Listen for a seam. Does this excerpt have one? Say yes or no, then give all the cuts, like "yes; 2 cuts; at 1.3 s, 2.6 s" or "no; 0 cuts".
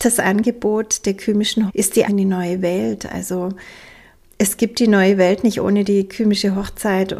yes; 2 cuts; at 1.7 s, 2.0 s